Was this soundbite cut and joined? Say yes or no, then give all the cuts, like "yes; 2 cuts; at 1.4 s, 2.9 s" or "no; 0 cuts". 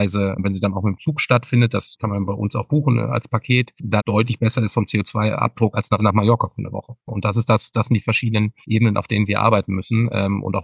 yes; 2 cuts; at 4.0 s, 6.0 s